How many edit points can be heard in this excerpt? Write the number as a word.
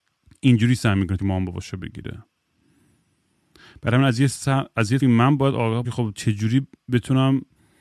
three